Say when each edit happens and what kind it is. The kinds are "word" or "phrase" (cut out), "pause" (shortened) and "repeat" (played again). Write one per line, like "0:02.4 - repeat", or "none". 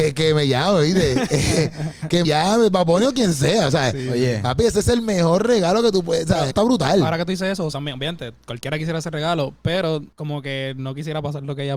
0:02.2 - word
0:06.5 - phrase
0:07.7 - phrase
0:10.1 - pause